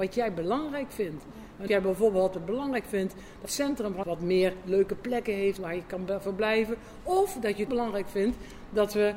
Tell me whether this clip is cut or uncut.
cut